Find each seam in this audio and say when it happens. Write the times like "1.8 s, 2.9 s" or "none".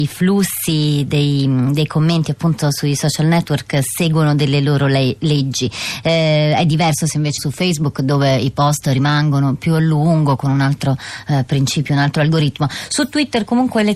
7.4 s